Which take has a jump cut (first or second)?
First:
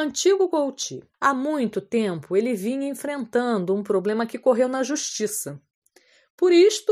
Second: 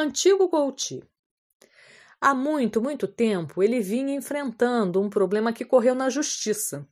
first